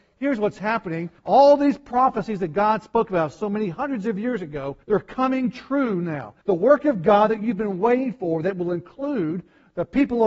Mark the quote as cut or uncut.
cut